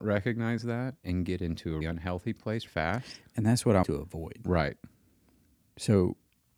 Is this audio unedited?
no; 3 cuts; at 1.8 s, 2.7 s, 3.8 s

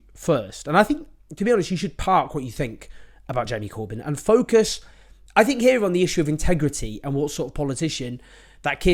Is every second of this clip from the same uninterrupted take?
yes; 0 cuts

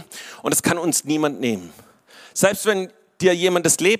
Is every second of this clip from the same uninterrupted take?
yes; 0 cuts

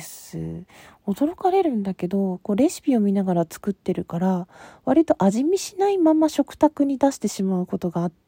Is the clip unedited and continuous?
yes; 0 cuts

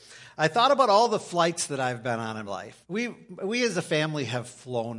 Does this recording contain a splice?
yes; 2 cuts; at 2.5 s, 2.8 s

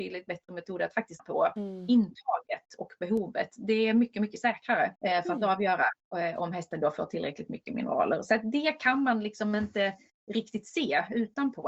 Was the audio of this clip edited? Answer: yes; 2 cuts; at 1.2 s, 5.0 s

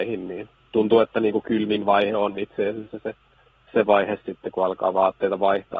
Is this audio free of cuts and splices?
yes; 0 cuts

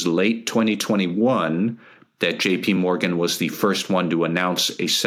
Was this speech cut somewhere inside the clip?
no; 0 cuts

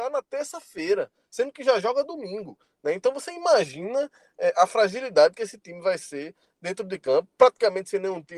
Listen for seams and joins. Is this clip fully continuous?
yes; 0 cuts

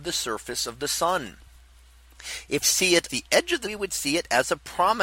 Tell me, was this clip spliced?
yes; 3 cuts; at 2.6 s, 3.1 s, 3.6 s

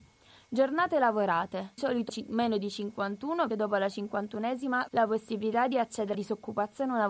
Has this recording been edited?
yes; 5 cuts; at 1.8 s, 2.1 s, 3.5 s, 4.9 s, 6.1 s

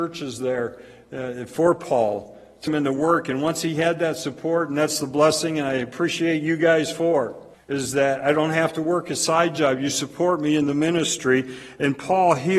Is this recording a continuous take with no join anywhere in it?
no; 2 cuts; at 2.7 s, 7.5 s

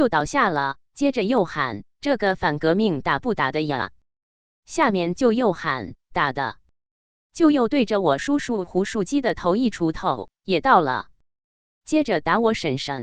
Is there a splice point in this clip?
no; 0 cuts

